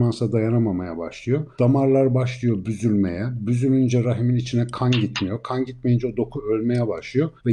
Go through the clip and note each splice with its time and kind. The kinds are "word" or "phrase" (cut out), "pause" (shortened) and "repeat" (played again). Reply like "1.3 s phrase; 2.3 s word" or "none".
none

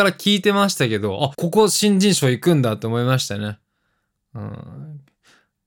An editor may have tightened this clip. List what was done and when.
1.3 s word

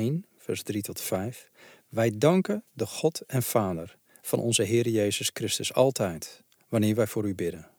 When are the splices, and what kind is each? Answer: none

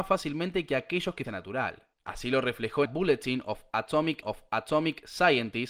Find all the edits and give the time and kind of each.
1.2 s phrase; 1.9 s pause; 2.8 s phrase; 4.2 s repeat

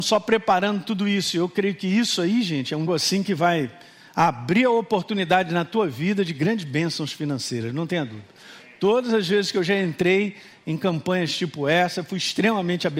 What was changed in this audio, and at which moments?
2.9 s phrase

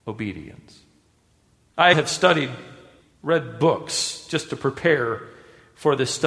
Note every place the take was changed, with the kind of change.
1.9 s phrase

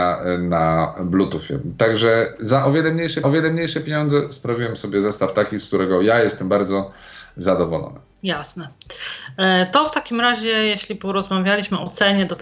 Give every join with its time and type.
3.2 s repeat; 8.1 s pause

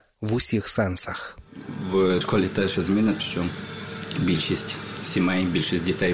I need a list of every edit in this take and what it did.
2.2 s word; 2.8 s word; 3.2 s word

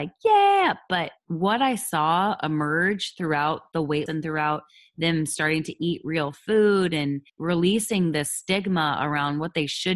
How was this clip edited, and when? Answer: 1.2 s pause; 4.1 s word; 7.3 s pause

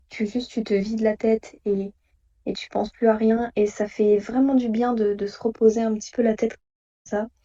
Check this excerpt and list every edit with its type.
none

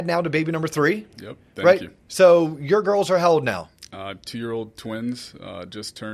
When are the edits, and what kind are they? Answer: none

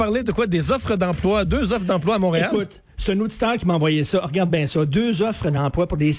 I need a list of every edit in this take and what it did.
none

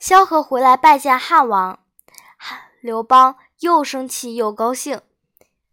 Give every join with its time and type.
none

